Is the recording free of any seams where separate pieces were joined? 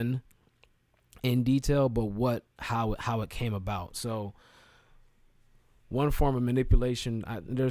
yes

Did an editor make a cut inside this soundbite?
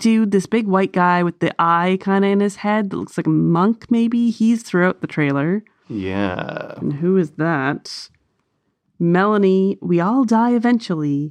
no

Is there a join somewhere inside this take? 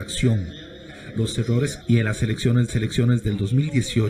yes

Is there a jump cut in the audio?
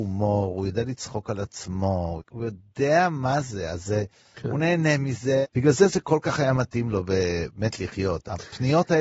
no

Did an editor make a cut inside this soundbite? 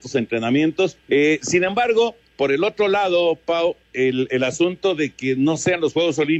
yes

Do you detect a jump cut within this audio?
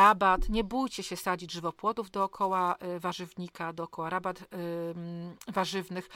no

